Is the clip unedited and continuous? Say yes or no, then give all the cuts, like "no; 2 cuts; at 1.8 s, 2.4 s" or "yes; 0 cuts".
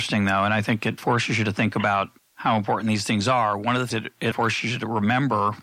no; 4 cuts; at 1.0 s, 2.2 s, 3.9 s, 4.3 s